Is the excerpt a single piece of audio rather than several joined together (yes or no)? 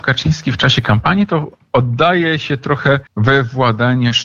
no